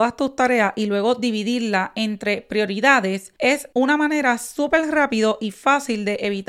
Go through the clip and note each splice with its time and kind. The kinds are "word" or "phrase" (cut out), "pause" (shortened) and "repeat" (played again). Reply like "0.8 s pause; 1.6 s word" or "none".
none